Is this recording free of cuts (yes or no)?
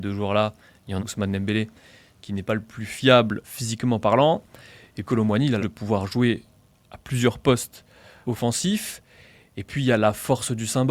no